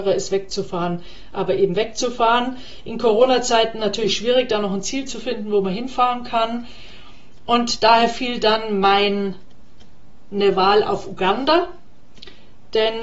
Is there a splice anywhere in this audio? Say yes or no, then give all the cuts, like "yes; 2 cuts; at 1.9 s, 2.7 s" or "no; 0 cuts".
no; 0 cuts